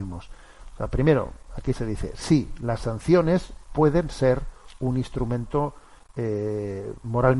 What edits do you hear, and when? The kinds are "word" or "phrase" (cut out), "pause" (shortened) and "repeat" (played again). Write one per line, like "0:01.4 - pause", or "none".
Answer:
none